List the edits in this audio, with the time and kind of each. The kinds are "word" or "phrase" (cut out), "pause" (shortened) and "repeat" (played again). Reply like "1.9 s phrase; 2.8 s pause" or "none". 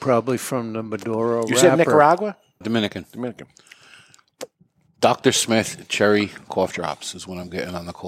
2.6 s word